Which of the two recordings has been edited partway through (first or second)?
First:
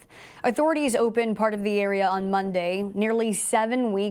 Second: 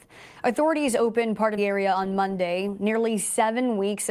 second